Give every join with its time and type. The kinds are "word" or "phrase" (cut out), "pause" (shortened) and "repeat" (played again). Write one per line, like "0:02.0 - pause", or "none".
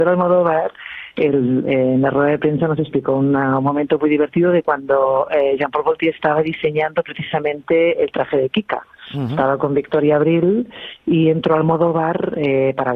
none

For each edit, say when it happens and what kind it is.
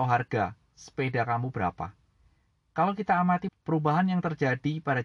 0:03.5 - word

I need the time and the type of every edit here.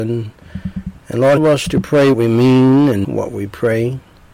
0:01.4 - phrase
0:02.1 - word
0:03.0 - word

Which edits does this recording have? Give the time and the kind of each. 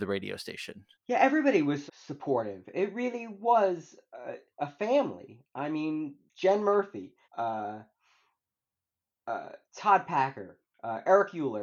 0:00.9 - pause
0:01.9 - word
0:06.3 - pause
0:07.2 - pause
0:09.6 - pause

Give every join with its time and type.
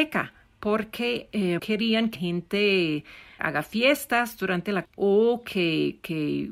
0:01.6 - word
0:02.2 - word
0:03.4 - word
0:04.8 - word

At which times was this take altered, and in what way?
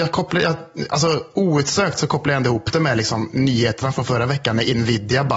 none

